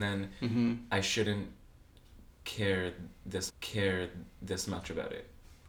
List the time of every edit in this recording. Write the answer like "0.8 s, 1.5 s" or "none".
3.5 s